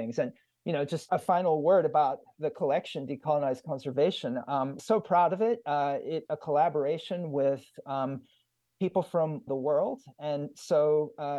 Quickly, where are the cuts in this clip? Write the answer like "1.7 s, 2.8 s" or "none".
1.1 s, 4.8 s, 6.3 s, 9.5 s